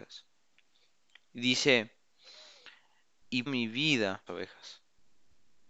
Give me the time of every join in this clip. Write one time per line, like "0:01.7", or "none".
0:03.5
0:04.3